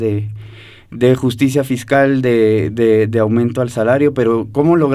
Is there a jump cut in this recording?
no; 0 cuts

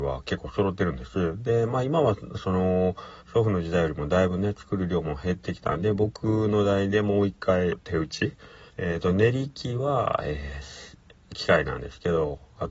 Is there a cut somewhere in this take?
yes; 3 cuts; at 3.2 s, 7.7 s, 8.7 s

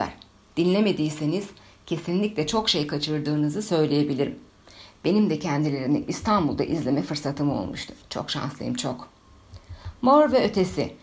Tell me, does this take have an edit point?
no; 0 cuts

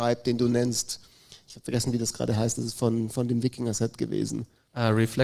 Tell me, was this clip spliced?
no; 0 cuts

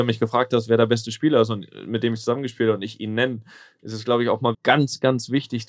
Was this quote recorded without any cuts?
no; 1 cut; at 4.5 s

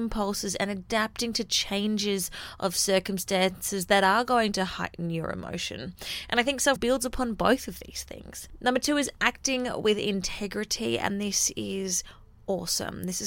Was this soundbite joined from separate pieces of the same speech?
yes; 1 cut; at 6.8 s

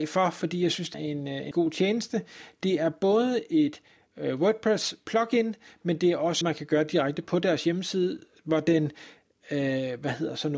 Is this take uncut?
no; 3 cuts; at 0.9 s, 1.5 s, 6.4 s

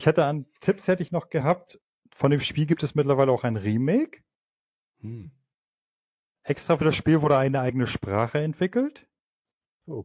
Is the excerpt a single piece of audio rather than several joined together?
yes; 0 cuts

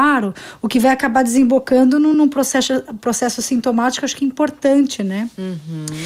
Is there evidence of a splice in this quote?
no; 0 cuts

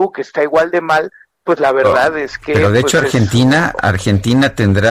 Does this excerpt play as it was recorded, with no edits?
yes; 0 cuts

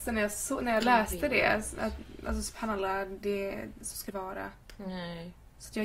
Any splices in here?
yes; 1 cut; at 4.1 s

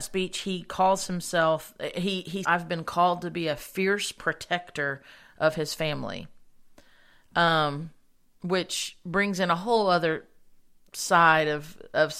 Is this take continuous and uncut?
no; 1 cut; at 2.4 s

